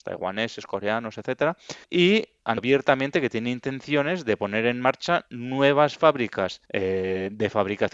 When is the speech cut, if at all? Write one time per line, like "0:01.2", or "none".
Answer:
0:01.8
0:02.6
0:06.6